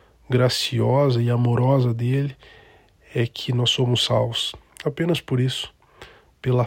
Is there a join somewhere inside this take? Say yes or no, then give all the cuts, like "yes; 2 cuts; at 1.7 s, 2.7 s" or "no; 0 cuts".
no; 0 cuts